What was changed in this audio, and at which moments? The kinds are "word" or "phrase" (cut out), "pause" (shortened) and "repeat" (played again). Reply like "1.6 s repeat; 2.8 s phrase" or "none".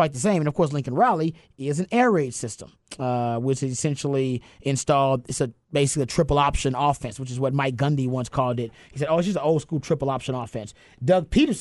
none